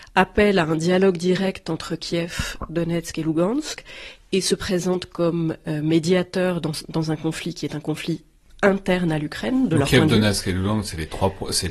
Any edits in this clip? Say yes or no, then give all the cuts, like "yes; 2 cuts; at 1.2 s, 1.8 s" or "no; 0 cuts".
no; 0 cuts